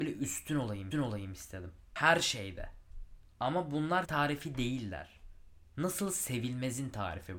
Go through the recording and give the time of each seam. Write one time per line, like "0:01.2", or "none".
0:00.9
0:04.0